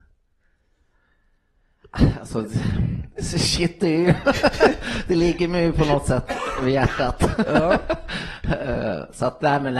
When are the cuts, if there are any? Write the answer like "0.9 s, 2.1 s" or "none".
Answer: none